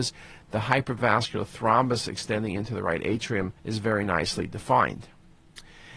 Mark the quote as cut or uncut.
cut